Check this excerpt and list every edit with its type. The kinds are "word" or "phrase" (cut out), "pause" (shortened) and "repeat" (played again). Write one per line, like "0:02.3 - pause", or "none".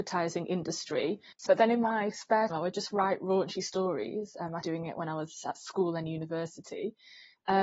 0:01.5 - phrase
0:02.5 - word
0:04.6 - word